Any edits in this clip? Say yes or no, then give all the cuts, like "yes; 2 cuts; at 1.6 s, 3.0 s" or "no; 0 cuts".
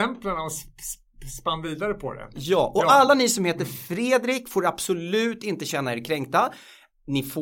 no; 0 cuts